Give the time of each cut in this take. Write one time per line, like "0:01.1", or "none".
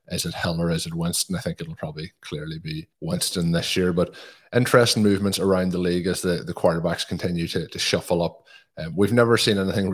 0:02.9